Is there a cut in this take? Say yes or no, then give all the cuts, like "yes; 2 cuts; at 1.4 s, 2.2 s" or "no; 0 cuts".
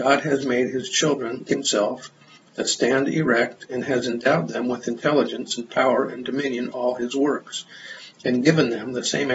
yes; 2 cuts; at 1.5 s, 6.7 s